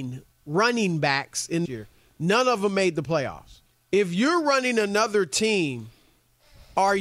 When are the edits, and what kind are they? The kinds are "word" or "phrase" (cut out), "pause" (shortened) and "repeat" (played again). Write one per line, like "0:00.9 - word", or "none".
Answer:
0:01.7 - phrase
0:03.7 - pause